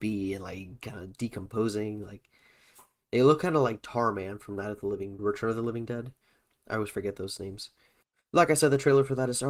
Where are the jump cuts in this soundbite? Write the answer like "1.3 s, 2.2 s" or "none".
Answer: 5.2 s